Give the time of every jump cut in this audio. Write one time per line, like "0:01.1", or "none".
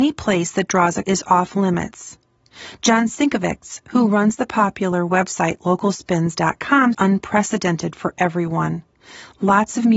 0:01.0
0:06.9